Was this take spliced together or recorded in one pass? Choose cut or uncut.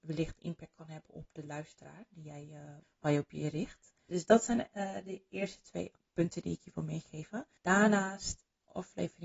cut